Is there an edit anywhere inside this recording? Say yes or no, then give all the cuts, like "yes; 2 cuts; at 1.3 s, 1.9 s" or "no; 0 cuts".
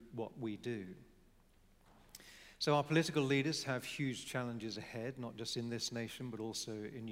no; 0 cuts